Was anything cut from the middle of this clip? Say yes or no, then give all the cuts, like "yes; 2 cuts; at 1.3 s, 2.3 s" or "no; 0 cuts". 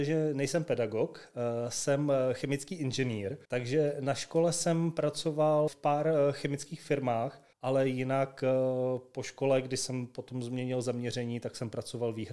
yes; 3 cuts; at 3.4 s, 5.7 s, 7.5 s